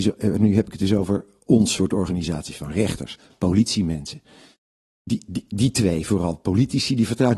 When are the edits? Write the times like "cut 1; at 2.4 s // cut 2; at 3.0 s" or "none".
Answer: none